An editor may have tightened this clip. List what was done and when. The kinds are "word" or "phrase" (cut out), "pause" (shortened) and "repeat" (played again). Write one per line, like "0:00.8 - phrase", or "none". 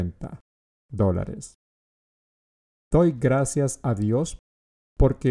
none